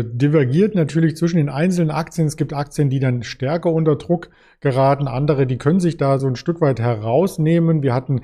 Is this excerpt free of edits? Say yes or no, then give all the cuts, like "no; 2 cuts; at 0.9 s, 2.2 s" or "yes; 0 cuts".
yes; 0 cuts